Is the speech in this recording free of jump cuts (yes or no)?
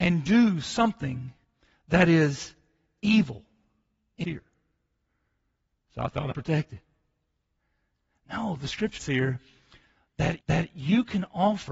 no